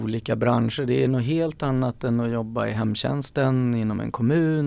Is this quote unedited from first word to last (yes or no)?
yes